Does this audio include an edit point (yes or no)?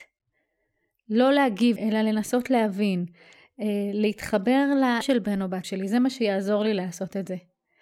yes